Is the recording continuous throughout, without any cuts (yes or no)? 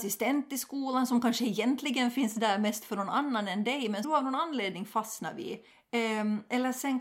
no